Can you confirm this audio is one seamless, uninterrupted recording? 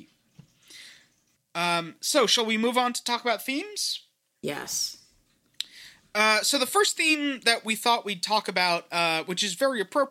yes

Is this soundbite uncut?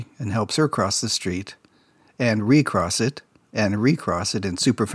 yes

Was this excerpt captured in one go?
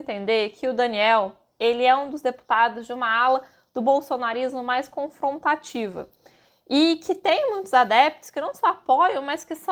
yes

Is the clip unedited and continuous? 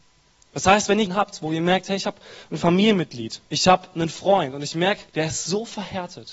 no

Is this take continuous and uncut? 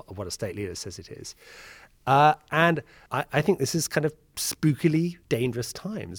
no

